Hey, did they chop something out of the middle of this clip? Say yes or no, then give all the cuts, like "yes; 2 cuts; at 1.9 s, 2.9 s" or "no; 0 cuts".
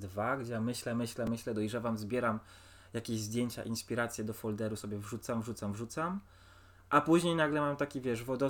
no; 0 cuts